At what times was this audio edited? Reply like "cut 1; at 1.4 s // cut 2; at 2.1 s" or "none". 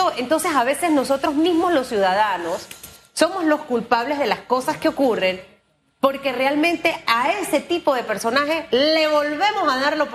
none